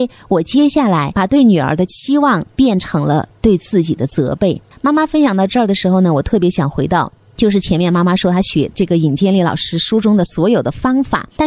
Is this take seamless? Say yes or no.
no